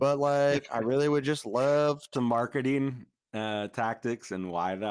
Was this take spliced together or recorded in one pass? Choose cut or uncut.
cut